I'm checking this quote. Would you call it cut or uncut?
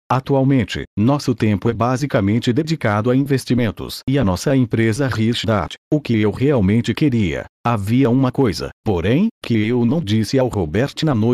cut